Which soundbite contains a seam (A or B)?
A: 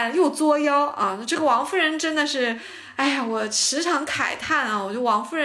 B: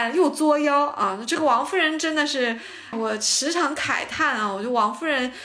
B